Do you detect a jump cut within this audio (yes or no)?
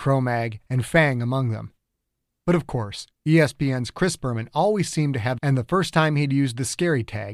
yes